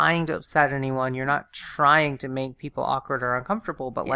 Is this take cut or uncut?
uncut